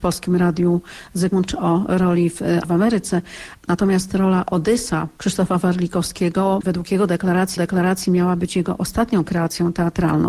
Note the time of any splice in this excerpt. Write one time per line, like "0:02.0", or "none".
0:01.5
0:02.6
0:05.2
0:06.6
0:07.6